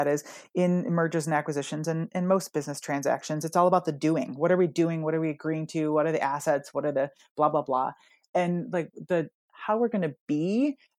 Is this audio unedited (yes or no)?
yes